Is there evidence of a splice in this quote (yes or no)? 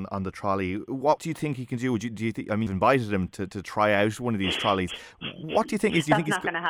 yes